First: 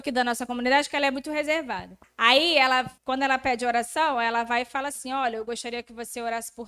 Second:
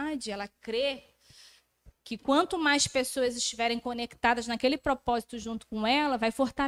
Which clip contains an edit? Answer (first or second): first